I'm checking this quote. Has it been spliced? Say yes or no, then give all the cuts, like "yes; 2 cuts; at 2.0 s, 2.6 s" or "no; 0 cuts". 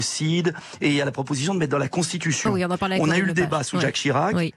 no; 0 cuts